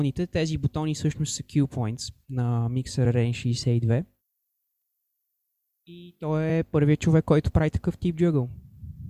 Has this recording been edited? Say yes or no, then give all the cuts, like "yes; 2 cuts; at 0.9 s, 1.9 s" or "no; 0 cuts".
no; 0 cuts